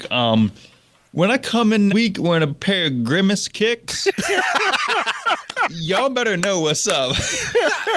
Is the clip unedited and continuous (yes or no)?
no